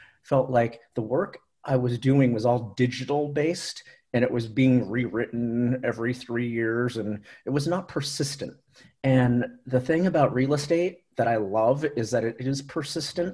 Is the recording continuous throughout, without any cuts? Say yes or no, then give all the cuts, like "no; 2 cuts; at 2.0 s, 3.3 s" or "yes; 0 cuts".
yes; 0 cuts